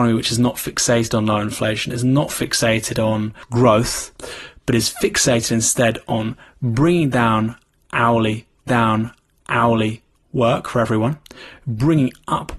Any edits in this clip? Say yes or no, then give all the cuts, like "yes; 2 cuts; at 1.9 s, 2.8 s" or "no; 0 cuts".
yes; 2 cuts; at 3.4 s, 8.7 s